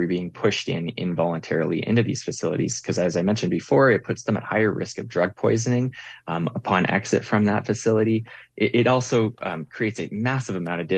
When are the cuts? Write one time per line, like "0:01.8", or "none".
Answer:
none